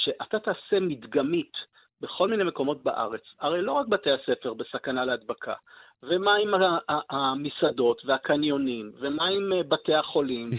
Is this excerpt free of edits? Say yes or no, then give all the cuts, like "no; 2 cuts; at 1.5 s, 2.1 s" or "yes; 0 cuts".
yes; 0 cuts